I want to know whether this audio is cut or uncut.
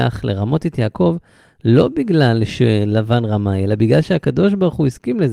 uncut